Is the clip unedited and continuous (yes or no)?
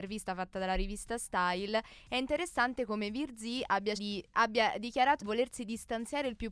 no